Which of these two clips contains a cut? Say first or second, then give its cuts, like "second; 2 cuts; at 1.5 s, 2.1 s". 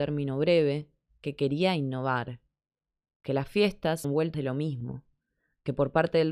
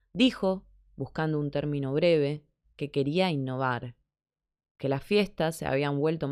first; 2 cuts; at 4.0 s, 4.3 s